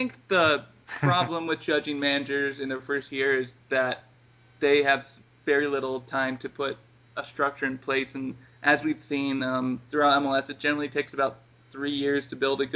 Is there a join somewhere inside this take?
no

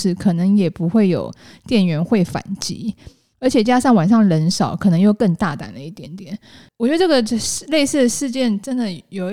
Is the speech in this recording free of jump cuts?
yes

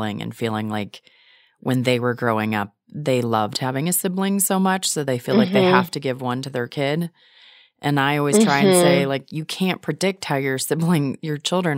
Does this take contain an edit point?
no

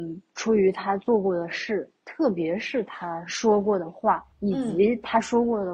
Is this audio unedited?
no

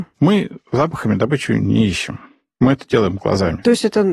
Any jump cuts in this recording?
no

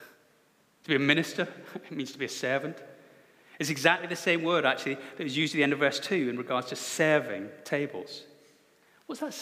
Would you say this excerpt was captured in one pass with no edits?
yes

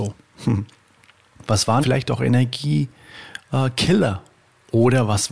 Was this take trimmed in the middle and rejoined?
yes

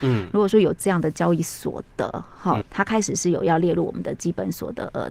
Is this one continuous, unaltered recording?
no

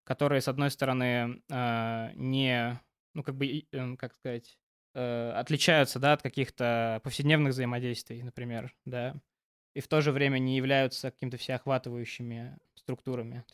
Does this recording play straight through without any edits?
yes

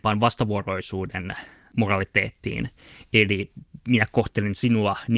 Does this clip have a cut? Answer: no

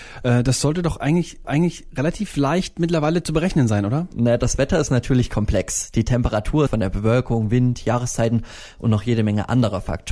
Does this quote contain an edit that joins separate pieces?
yes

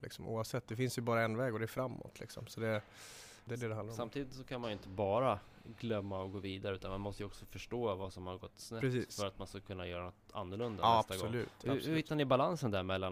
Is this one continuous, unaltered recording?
no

